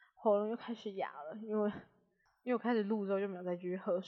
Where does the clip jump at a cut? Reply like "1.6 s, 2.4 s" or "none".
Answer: none